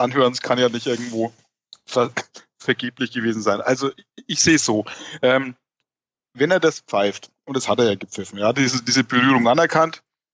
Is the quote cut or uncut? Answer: uncut